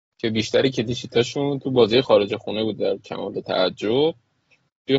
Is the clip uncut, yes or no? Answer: yes